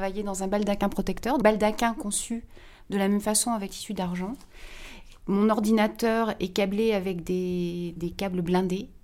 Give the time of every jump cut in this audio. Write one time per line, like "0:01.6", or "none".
0:01.4
0:03.7
0:08.0